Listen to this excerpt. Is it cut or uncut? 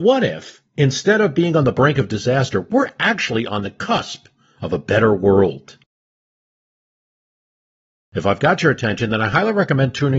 uncut